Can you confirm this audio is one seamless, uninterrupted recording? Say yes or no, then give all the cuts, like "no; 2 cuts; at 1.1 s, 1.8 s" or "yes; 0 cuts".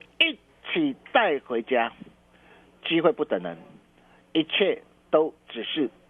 yes; 0 cuts